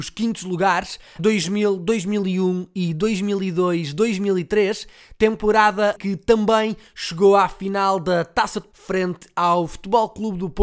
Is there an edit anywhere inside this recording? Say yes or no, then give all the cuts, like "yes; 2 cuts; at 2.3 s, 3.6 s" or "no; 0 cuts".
yes; 3 cuts; at 1.2 s, 5.9 s, 8.7 s